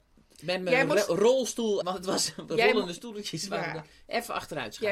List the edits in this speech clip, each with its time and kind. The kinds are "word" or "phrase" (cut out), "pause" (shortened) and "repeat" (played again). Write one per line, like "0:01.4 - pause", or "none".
0:01.8 - word